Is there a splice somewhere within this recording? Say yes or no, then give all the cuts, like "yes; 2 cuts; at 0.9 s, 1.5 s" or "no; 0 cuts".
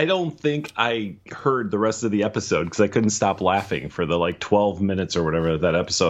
yes; 1 cut; at 1.2 s